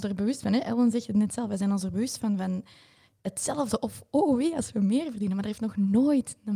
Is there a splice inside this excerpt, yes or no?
no